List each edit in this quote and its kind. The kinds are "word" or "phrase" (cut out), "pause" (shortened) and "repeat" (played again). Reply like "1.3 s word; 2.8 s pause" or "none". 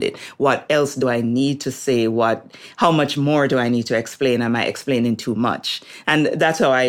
none

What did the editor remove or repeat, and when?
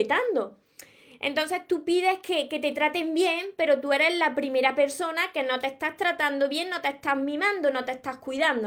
none

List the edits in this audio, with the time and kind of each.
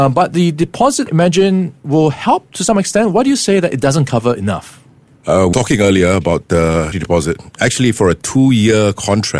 1.1 s word; 5.5 s word; 6.9 s word

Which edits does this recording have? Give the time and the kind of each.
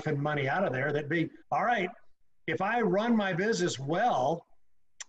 1.4 s pause

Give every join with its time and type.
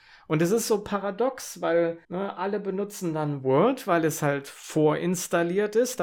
2.0 s pause

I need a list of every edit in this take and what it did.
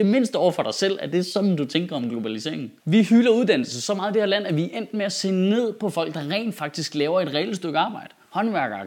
2.8 s pause

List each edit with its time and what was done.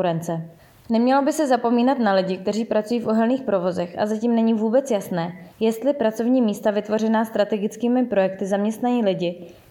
5.5 s pause

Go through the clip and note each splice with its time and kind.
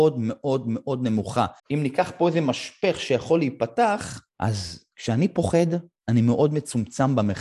1.6 s pause; 4.3 s pause

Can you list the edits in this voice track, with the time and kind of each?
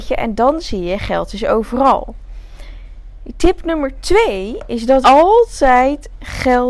5.0 s word

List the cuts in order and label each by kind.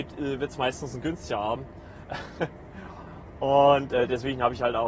none

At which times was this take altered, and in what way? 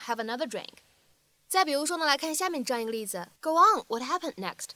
3.4 s pause

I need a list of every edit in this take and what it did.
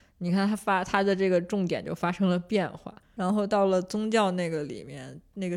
3.0 s pause

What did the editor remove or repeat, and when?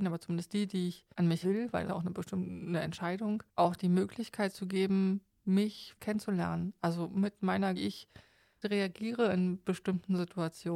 1.1 s pause; 1.4 s word; 1.9 s phrase; 3.5 s pause; 6.0 s word; 7.8 s phrase; 8.6 s word

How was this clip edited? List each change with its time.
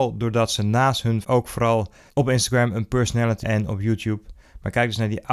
1.2 s word; 2.1 s pause; 3.4 s word

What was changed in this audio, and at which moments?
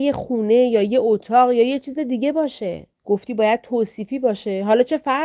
2.9 s pause

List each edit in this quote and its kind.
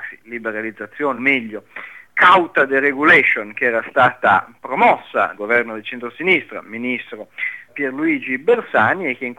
1.2 s word; 2.0 s word; 5.4 s word; 7.7 s word

